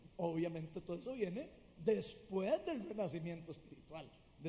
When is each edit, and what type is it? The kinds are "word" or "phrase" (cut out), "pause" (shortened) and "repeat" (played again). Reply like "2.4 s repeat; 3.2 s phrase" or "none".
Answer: none